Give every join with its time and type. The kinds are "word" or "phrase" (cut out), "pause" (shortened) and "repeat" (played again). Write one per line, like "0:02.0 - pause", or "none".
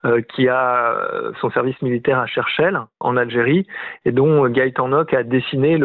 0:01.4 - word
0:03.0 - word

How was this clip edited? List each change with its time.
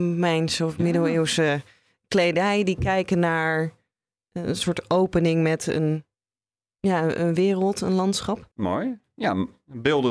0:08.5 - pause

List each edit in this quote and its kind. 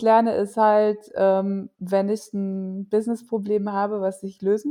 0:01.7 - pause

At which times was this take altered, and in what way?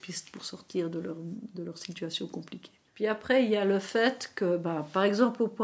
0:02.9 - pause

